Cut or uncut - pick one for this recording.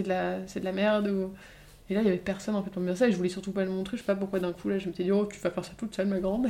uncut